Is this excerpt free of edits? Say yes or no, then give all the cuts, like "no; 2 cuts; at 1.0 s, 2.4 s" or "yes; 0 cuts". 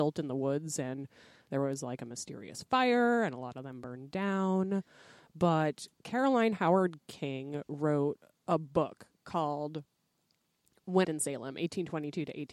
no; 3 cuts; at 5.9 s, 9.1 s, 11.0 s